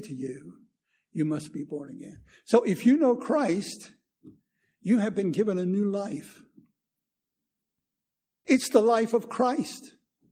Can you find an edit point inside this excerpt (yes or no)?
no